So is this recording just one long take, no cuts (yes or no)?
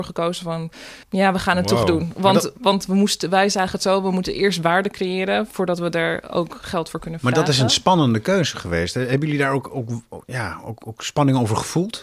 no